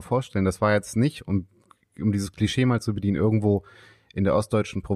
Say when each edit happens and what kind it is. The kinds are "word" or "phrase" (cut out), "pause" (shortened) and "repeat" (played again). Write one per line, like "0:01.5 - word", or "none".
none